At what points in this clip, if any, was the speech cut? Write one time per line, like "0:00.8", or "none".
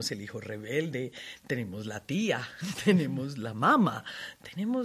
none